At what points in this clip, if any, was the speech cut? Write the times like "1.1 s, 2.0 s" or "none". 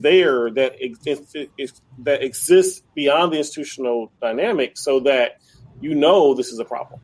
none